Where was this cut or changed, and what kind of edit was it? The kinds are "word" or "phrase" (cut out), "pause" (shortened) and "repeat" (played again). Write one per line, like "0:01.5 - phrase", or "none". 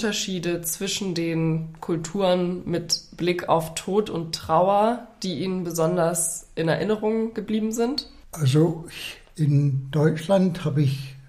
none